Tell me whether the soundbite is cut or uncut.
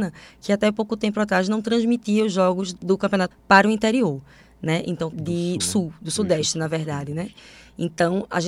cut